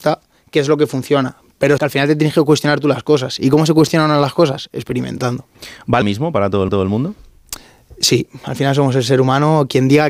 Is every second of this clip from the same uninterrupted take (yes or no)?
no